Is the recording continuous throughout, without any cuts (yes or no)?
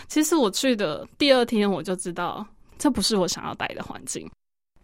yes